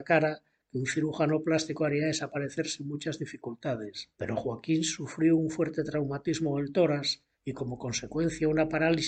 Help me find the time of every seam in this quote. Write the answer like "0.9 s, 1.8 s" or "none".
4.1 s, 7.3 s